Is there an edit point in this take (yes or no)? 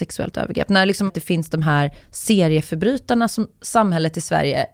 yes